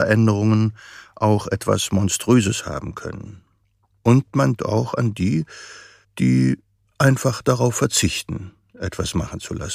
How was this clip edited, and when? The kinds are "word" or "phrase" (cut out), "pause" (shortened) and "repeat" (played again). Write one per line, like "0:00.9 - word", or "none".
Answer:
0:04.6 - word
0:06.0 - pause